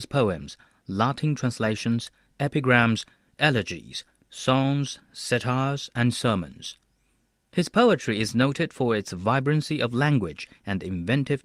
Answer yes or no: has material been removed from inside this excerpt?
no